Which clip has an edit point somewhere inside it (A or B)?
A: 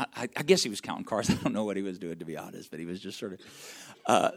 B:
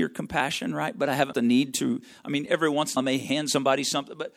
B